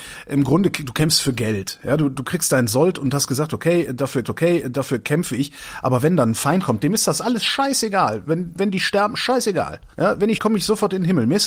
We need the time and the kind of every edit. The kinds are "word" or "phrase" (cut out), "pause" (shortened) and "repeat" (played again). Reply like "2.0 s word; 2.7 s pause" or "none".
4.2 s repeat; 9.9 s pause; 10.3 s word